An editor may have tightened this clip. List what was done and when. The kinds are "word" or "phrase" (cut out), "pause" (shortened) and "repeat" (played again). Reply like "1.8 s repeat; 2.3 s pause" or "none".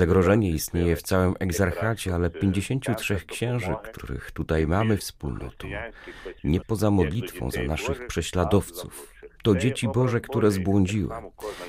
5.0 s phrase; 6.6 s phrase